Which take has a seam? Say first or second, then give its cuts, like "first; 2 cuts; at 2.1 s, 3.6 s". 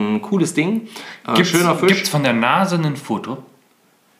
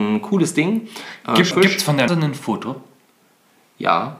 second; 2 cuts; at 1.5 s, 2.1 s